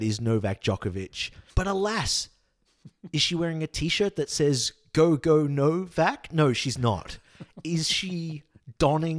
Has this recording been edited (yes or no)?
yes